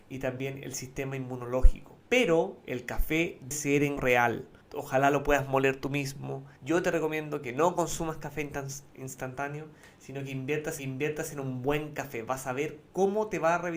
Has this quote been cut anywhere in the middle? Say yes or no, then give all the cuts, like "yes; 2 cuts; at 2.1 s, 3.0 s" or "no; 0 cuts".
yes; 6 cuts; at 2.0 s, 3.5 s, 4.0 s, 4.6 s, 6.6 s, 10.8 s